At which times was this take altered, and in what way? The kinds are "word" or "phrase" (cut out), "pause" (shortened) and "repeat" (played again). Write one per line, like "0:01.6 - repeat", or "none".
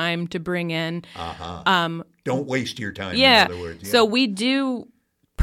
none